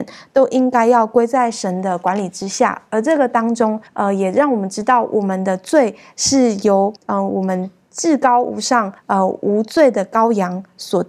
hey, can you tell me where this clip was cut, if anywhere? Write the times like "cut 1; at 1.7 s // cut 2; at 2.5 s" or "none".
cut 1; at 3.9 s // cut 2; at 7.0 s // cut 3; at 9.0 s